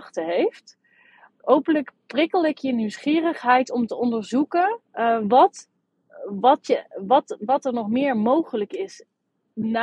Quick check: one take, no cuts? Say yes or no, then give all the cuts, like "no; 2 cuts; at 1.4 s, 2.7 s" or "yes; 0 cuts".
no; 1 cut; at 4.8 s